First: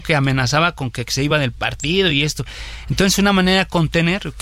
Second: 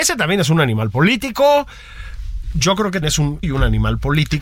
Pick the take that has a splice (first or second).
second